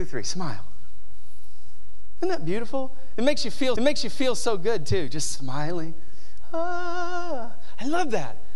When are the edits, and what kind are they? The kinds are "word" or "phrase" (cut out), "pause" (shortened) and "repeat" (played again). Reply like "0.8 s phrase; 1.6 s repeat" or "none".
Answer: 3.8 s repeat